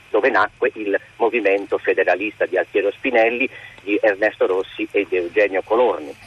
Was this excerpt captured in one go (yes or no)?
yes